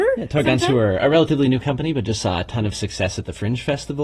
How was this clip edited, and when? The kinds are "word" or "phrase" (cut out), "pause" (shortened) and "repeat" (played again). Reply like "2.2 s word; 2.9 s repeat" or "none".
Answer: 1.0 s word